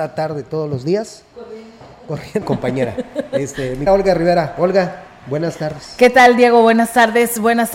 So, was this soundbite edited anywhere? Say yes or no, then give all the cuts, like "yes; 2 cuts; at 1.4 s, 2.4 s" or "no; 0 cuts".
yes; 2 cuts; at 2.4 s, 3.9 s